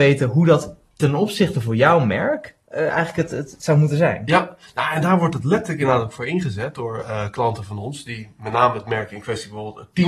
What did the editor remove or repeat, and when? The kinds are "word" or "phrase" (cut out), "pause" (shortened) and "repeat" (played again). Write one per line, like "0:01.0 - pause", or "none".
none